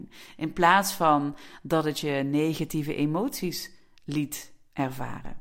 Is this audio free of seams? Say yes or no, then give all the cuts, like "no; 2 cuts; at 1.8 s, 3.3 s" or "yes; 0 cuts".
yes; 0 cuts